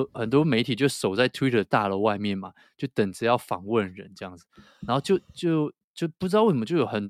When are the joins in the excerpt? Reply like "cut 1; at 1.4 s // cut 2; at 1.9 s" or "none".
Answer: none